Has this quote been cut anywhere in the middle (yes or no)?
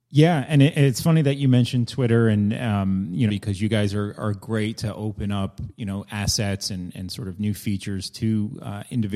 yes